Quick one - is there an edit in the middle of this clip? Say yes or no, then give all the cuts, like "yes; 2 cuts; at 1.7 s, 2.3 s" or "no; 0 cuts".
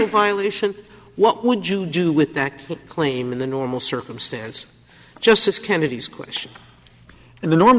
no; 0 cuts